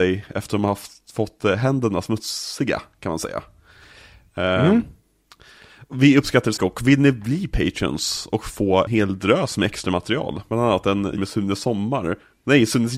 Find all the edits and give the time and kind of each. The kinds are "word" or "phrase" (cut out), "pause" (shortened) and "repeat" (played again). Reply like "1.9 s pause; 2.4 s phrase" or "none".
6.6 s word; 8.9 s word; 11.2 s word